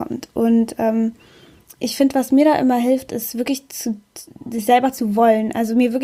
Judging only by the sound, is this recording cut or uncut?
uncut